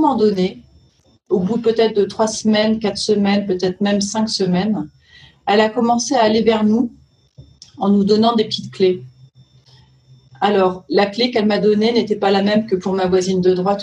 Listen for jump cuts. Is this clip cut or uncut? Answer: uncut